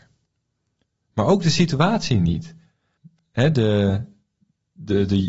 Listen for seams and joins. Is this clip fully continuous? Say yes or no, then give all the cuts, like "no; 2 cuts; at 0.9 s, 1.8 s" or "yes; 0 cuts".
no; 1 cut; at 3.0 s